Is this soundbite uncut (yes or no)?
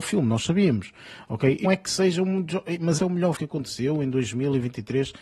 no